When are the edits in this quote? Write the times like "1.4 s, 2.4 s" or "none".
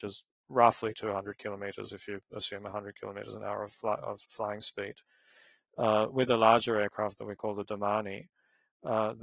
4.2 s